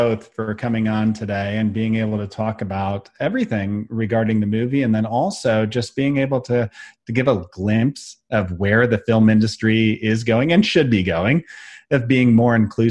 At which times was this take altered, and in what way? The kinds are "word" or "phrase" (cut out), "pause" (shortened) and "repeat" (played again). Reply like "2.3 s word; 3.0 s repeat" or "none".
none